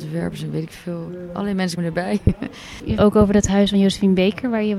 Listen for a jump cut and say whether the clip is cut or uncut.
cut